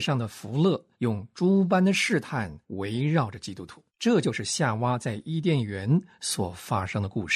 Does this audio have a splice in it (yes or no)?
yes